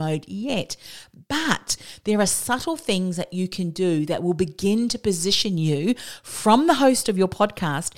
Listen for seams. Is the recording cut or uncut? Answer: uncut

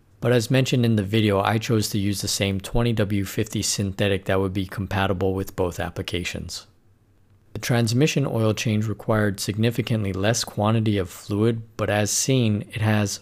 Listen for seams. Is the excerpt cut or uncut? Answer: uncut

